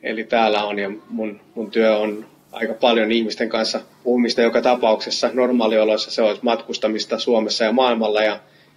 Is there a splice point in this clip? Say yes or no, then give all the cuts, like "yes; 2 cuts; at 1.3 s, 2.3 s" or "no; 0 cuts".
yes; 1 cut; at 3.9 s